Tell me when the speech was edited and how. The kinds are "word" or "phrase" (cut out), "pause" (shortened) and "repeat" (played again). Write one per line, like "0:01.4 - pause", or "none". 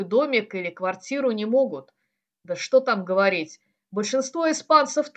none